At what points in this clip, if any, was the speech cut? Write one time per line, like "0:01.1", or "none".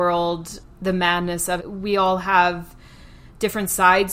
0:01.6